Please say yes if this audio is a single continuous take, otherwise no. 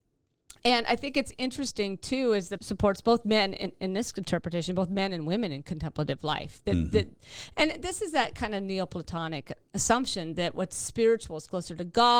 no